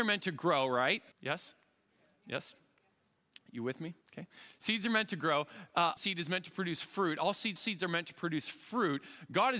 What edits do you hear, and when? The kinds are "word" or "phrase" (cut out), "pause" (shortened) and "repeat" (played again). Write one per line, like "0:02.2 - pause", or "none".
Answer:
0:01.1 - pause
0:04.0 - pause
0:06.0 - phrase
0:07.6 - repeat